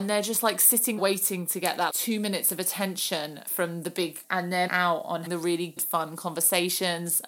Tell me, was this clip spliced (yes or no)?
yes